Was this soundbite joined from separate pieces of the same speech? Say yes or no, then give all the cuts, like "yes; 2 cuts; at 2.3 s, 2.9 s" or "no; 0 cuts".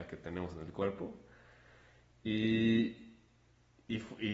no; 0 cuts